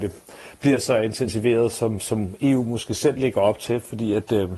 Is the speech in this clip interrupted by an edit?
no; 0 cuts

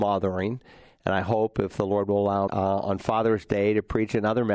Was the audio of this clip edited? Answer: yes; 1 cut; at 2.5 s

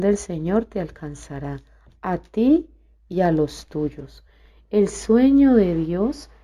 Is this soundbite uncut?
yes; 0 cuts

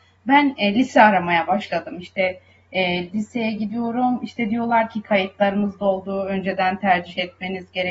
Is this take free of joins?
yes; 0 cuts

